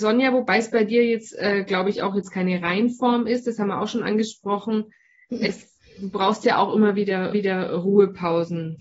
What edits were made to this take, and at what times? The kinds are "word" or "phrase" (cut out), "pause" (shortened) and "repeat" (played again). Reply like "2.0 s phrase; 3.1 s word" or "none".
7.3 s repeat